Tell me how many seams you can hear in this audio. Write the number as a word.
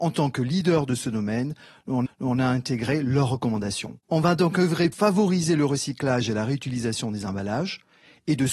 three